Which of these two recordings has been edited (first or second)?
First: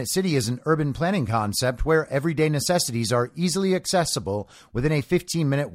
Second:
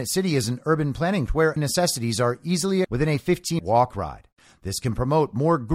second